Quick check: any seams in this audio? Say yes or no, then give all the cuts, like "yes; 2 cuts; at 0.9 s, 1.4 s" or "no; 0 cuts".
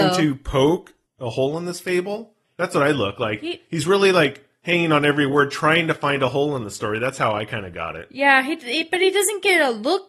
no; 0 cuts